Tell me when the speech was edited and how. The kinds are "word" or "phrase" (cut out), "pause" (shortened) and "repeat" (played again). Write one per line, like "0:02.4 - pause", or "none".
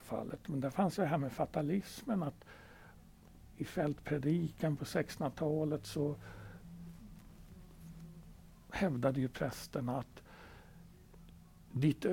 0:01.0 - word